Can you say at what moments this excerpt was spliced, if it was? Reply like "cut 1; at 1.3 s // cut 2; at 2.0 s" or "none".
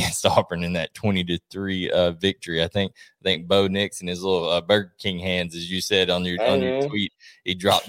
none